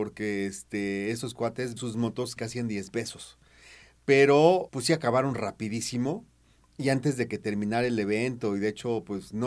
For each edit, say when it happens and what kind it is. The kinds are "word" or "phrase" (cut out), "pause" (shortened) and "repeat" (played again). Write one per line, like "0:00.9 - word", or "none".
0:01.8 - word
0:02.4 - word
0:02.9 - word
0:04.7 - word